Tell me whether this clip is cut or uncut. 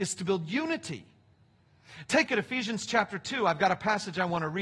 cut